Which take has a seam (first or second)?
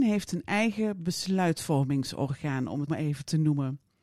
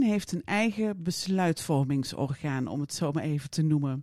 first